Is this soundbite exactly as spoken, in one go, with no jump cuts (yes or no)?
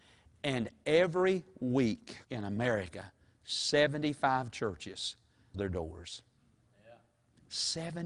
no